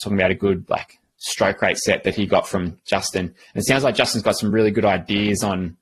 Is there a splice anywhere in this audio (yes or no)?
no